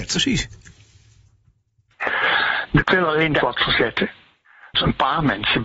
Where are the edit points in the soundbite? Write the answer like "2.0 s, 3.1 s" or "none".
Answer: 2.8 s, 3.4 s, 4.7 s